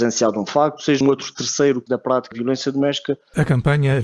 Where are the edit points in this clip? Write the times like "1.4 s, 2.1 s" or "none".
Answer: 1.0 s, 1.9 s, 2.3 s

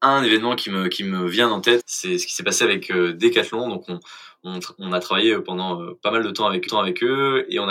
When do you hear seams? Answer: 1.8 s, 6.7 s

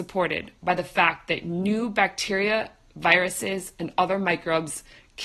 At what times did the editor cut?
none

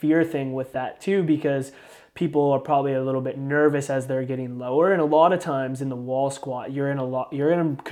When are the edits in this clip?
none

